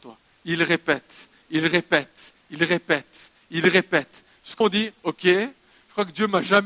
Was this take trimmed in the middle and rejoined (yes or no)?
yes